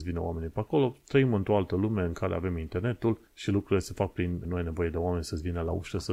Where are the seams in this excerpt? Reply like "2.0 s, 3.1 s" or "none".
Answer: 3.3 s, 4.4 s